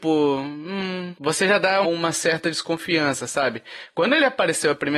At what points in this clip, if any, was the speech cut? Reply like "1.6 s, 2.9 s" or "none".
1.8 s